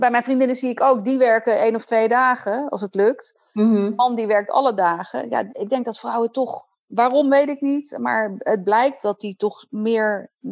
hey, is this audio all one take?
yes; 0 cuts

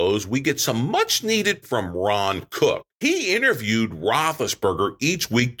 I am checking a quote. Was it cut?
yes; 2 cuts; at 1.6 s, 2.9 s

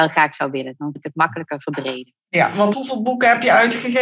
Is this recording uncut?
no; 3 cuts; at 1.0 s, 2.2 s, 2.7 s

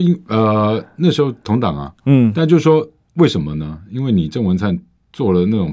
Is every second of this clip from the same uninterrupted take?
yes; 0 cuts

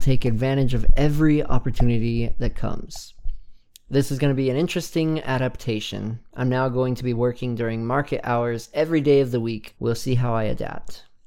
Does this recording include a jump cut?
yes; 1 cut; at 9.7 s

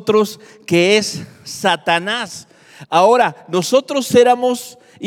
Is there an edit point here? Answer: no; 0 cuts

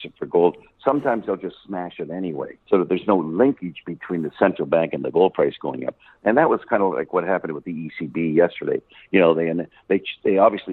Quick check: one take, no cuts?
no; 1 cut; at 2.6 s

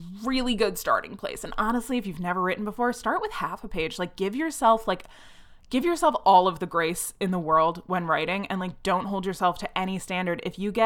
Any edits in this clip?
no; 0 cuts

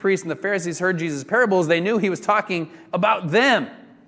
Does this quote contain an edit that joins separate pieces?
no; 0 cuts

